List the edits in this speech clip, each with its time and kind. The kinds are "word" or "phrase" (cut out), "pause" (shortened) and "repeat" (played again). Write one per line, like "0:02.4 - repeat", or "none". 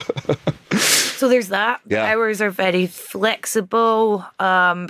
none